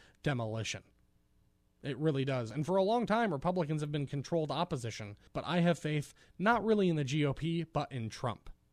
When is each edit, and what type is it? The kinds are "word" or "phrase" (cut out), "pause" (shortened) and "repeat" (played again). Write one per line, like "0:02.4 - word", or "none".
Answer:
0:05.3 - pause